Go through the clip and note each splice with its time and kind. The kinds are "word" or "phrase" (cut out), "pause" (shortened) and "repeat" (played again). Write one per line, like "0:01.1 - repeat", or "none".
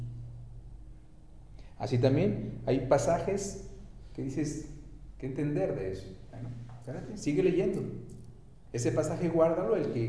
none